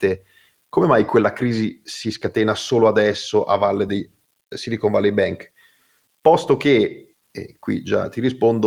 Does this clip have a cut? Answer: no; 0 cuts

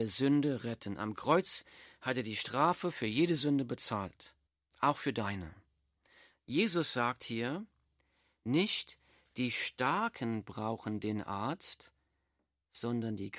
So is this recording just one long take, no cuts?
no; 1 cut; at 4.5 s

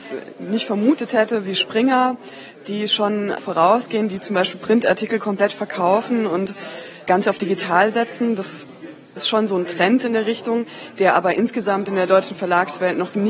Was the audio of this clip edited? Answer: no; 0 cuts

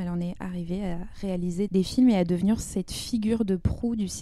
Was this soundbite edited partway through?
yes; 1 cut; at 1.7 s

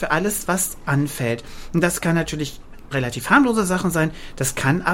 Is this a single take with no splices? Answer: no; 1 cut; at 2.9 s

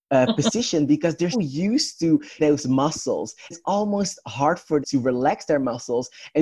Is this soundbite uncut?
no; 4 cuts; at 1.3 s, 2.4 s, 3.5 s, 4.8 s

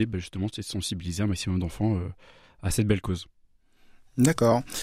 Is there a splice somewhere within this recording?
no; 0 cuts

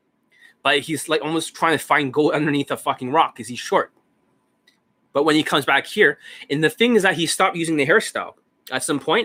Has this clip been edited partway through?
no; 0 cuts

